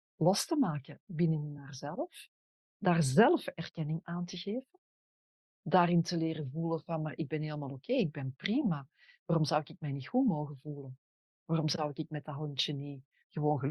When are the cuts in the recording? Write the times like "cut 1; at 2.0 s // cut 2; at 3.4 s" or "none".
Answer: none